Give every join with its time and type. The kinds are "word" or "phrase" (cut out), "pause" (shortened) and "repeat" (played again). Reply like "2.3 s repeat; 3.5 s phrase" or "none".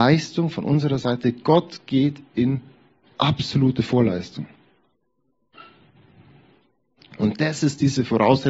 none